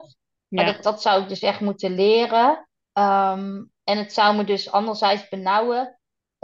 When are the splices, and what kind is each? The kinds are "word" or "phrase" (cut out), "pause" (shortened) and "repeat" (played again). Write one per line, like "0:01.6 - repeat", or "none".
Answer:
0:02.8 - pause